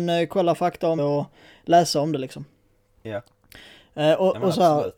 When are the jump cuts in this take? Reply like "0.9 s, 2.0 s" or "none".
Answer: 1.0 s